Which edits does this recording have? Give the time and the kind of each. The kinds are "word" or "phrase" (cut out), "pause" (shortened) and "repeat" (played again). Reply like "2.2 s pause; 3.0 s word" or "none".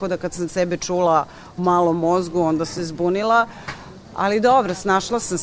1.6 s word; 2.8 s word